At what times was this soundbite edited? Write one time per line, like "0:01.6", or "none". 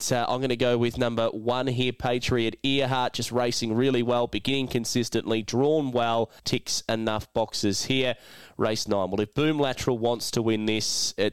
0:06.4